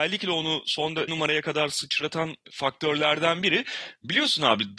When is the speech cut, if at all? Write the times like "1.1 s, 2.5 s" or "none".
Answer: 1.1 s, 2.4 s